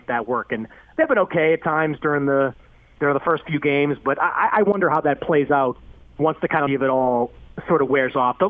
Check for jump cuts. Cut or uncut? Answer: cut